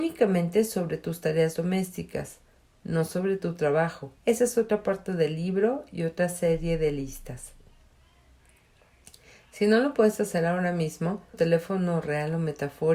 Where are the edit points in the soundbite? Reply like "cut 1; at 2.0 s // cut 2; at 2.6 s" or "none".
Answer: cut 1; at 4.2 s // cut 2; at 11.3 s